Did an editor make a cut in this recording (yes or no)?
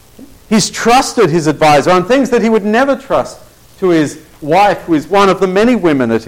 no